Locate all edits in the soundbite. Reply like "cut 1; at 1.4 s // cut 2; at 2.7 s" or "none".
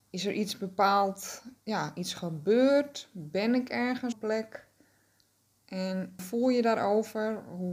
cut 1; at 1.6 s // cut 2; at 4.1 s // cut 3; at 6.2 s